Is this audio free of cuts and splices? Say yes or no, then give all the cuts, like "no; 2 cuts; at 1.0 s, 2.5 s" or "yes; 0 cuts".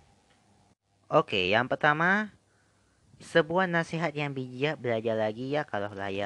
yes; 0 cuts